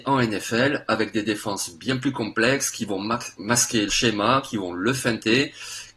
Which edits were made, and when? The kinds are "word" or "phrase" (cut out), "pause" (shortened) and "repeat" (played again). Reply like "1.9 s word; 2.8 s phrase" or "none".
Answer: 3.9 s word